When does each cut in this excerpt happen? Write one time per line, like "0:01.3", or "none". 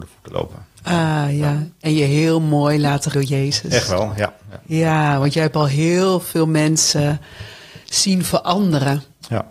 0:03.1